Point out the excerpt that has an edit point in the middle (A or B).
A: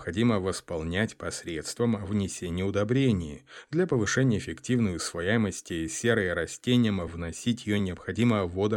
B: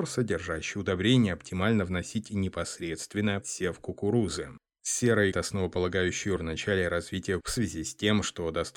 B